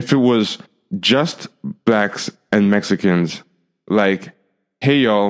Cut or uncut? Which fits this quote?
uncut